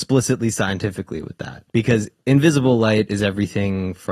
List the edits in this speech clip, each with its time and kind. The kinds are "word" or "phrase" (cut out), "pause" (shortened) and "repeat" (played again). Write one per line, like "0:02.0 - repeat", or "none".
0:01.7 - pause